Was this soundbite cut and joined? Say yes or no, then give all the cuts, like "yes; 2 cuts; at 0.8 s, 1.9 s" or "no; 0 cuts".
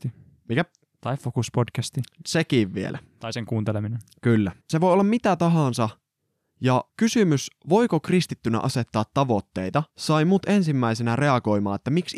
yes; 3 cuts; at 4.6 s, 6.9 s, 9.9 s